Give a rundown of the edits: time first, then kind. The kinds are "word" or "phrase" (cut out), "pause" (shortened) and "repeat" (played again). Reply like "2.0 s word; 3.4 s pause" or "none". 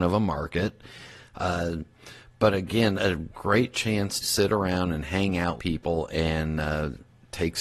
3.0 s word; 4.2 s word; 5.6 s word